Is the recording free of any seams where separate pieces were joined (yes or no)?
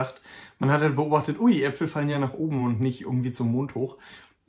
yes